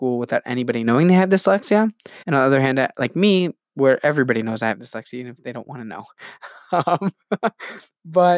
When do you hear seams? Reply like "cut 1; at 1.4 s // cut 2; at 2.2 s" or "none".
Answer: cut 1; at 2.2 s